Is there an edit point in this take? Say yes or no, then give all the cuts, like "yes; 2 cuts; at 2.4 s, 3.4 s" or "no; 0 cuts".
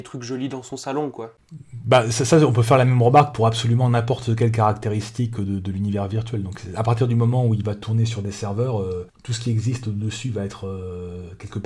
yes; 1 cut; at 9.1 s